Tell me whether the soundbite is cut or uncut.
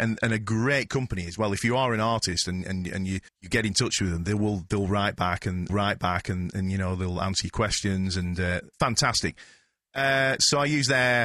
cut